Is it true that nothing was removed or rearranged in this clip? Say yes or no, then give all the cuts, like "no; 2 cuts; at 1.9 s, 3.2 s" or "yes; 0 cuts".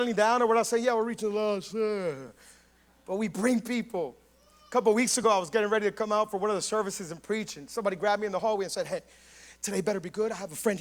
yes; 0 cuts